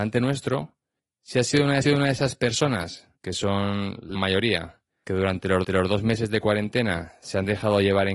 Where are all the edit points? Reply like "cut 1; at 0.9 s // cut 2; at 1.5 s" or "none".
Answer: cut 1; at 1.8 s // cut 2; at 3.1 s // cut 3; at 4.1 s // cut 4; at 5.6 s